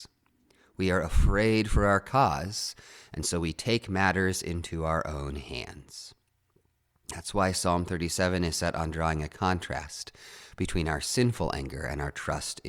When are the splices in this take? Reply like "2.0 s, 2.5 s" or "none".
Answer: none